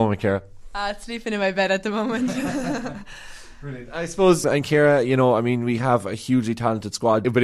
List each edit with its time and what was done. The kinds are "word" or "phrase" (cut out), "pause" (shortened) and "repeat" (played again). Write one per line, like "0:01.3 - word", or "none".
0:04.4 - word